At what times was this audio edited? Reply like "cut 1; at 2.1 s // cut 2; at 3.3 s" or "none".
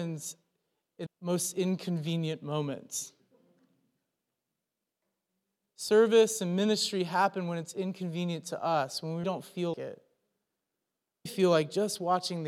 cut 1; at 1.1 s // cut 2; at 9.2 s // cut 3; at 9.7 s // cut 4; at 11.3 s

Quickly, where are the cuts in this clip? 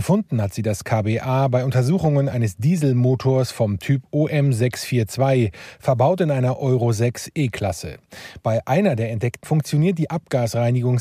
cut 1; at 9.4 s

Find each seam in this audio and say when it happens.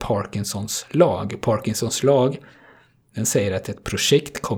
none

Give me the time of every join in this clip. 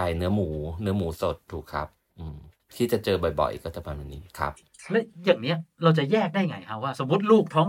cut 1; at 2.6 s

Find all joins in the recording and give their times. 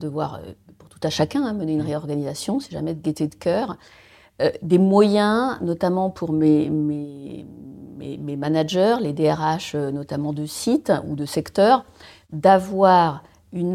none

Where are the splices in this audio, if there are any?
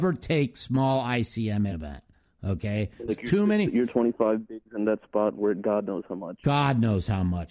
cut 1; at 1.7 s // cut 2; at 3.1 s // cut 3; at 5.3 s

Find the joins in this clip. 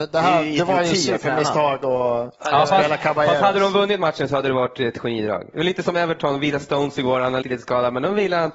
cut 1; at 7.4 s

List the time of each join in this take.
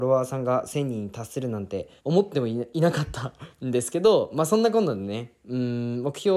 cut 1; at 2.0 s

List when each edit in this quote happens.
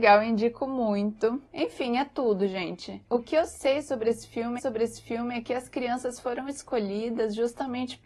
cut 1; at 4.6 s

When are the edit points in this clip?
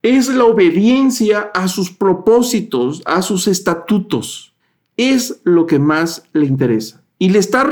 cut 1; at 4.6 s

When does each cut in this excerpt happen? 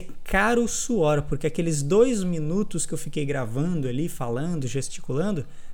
none

